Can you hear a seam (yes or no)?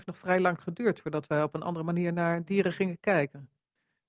no